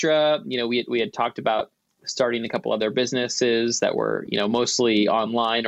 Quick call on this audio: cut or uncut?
uncut